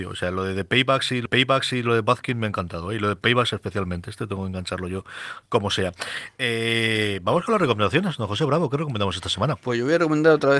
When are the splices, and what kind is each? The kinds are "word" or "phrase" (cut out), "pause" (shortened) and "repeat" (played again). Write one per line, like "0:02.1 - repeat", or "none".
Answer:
0:01.3 - repeat